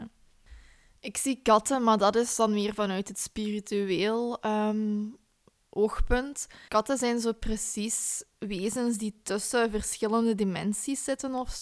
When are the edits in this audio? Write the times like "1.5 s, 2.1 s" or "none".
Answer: 6.7 s